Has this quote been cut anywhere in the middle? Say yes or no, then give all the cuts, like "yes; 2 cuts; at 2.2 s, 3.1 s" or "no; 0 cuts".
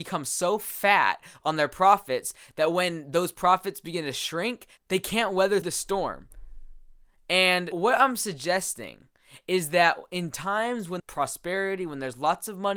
yes; 3 cuts; at 5.6 s, 7.7 s, 11.0 s